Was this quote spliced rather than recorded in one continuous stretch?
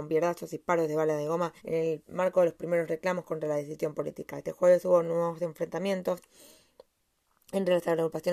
yes; 1 cut; at 1.6 s

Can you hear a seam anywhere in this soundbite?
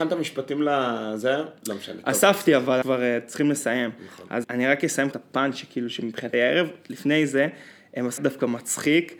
yes; 5 cuts; at 2.8 s, 4.4 s, 5.1 s, 6.3 s, 8.2 s

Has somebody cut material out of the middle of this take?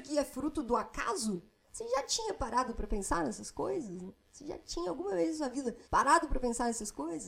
yes; 1 cut; at 5.8 s

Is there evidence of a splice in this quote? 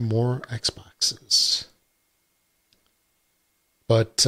no; 0 cuts

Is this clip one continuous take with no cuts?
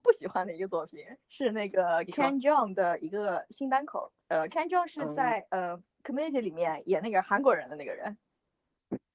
no; 3 cuts; at 1.2 s, 4.2 s, 5.9 s

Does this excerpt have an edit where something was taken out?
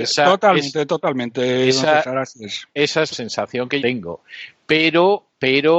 yes; 3 cuts; at 2.7 s, 3.1 s, 3.8 s

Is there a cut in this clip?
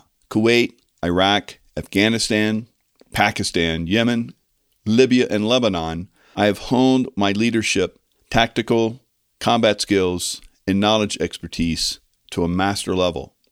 no; 0 cuts

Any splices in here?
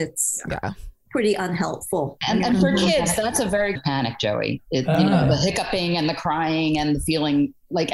yes; 1 cut; at 3.8 s

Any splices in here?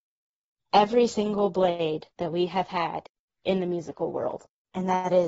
no; 0 cuts

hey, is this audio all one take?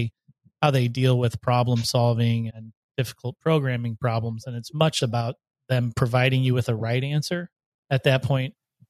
no; 2 cuts; at 2.5 s, 5.0 s

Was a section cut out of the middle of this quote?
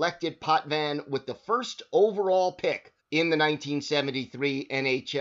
yes; 1 cut; at 3.0 s

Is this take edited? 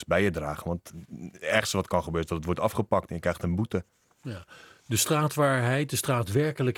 no; 0 cuts

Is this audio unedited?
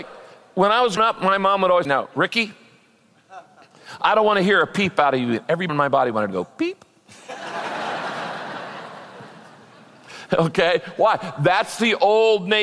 no; 3 cuts; at 1.0 s, 1.8 s, 5.7 s

